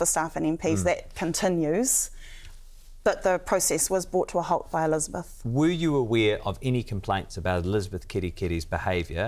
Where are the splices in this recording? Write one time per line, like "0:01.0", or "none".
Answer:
none

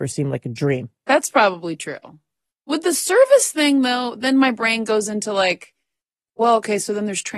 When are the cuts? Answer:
none

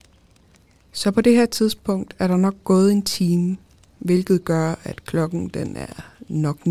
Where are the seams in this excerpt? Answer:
none

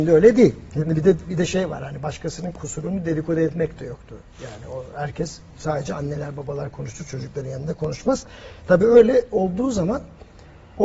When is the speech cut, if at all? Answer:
none

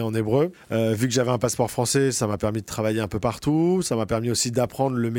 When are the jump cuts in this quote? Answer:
none

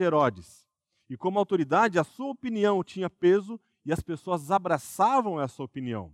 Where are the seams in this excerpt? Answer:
none

